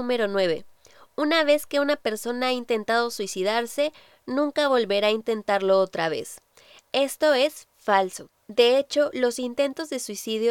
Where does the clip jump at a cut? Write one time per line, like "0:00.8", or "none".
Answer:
none

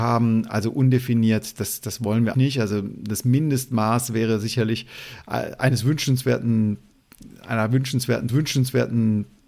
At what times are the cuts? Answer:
0:02.3
0:08.3

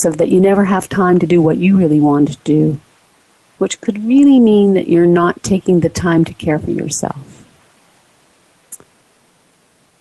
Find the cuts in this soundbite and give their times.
none

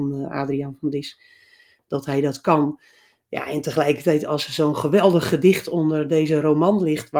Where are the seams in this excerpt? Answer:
none

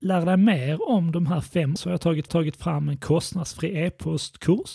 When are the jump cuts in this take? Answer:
0:01.8
0:02.3

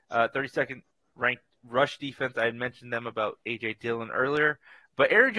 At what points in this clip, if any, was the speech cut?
none

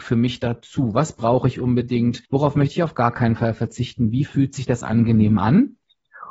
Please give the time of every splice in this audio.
0:02.2

